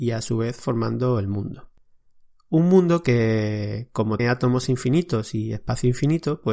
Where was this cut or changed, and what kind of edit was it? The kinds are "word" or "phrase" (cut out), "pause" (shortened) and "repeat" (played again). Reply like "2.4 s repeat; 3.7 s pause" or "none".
4.2 s word